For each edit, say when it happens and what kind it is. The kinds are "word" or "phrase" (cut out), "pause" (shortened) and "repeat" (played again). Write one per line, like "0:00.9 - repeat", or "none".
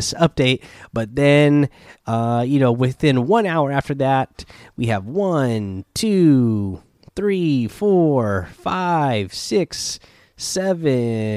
none